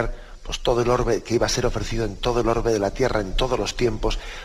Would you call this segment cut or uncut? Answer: uncut